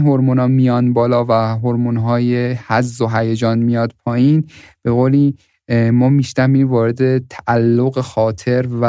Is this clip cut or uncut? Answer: uncut